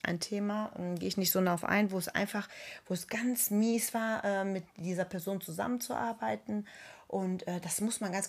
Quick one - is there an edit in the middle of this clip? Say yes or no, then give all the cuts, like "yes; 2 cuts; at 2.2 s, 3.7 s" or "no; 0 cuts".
no; 0 cuts